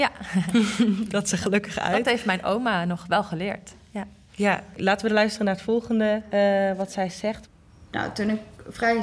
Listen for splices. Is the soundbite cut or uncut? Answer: cut